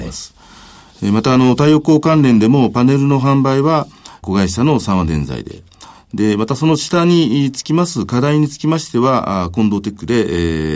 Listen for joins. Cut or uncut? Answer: uncut